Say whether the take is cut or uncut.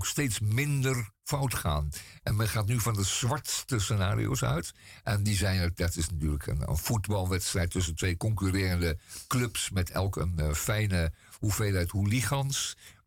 uncut